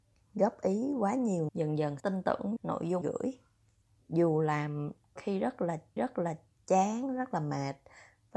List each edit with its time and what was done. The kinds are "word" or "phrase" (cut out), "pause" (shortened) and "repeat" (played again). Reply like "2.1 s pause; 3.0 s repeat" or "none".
1.5 s word; 2.0 s word; 2.6 s phrase; 3.0 s phrase; 3.8 s pause; 5.2 s word; 6.0 s repeat